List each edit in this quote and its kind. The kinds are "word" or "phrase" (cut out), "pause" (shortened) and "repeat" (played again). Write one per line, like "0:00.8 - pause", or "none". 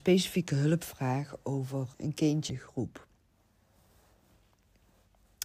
0:01.9 - word
0:02.5 - word